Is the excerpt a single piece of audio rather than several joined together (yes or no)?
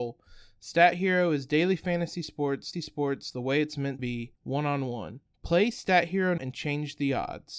no